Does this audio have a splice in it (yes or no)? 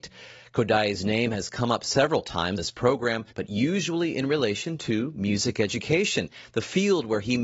yes